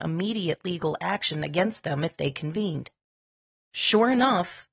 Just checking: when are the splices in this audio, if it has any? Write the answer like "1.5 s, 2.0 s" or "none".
none

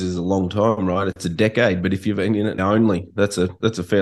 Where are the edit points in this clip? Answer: 2.1 s, 2.6 s

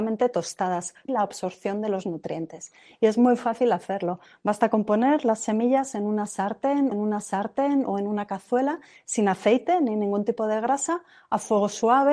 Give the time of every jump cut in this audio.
1.1 s, 6.9 s

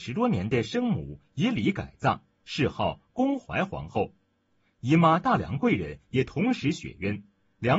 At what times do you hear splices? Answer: none

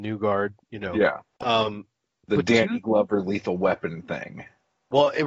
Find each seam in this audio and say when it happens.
1.3 s

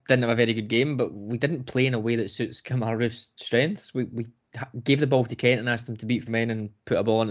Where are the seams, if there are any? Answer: 6.3 s

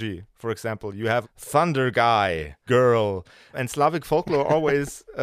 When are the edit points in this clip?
1.2 s, 2.7 s, 3.5 s

